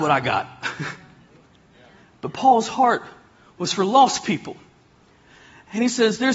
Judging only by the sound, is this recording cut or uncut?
uncut